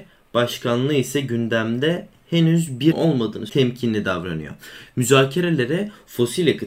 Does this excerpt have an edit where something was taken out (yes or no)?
yes